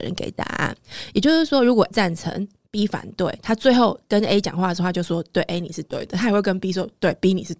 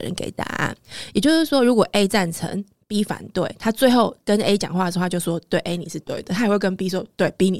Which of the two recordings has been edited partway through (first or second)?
first